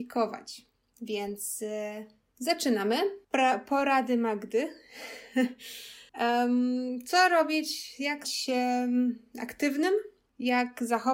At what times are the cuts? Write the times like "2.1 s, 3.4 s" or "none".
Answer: 3.2 s, 6.1 s, 8.2 s